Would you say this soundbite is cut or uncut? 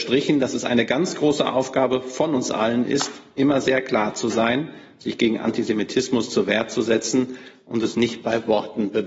uncut